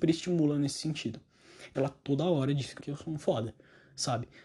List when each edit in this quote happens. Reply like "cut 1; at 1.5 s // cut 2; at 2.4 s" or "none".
cut 1; at 1.7 s // cut 2; at 2.8 s // cut 3; at 3.2 s